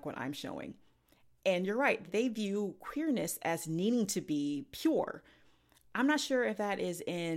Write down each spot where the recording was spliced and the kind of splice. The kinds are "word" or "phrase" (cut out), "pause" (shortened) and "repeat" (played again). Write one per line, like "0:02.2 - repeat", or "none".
0:02.1 - word